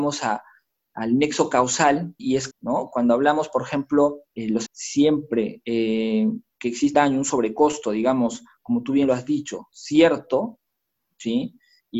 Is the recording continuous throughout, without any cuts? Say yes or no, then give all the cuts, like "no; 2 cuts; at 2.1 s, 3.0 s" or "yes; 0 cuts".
no; 5 cuts; at 2.2 s, 2.5 s, 4.3 s, 4.7 s, 6.9 s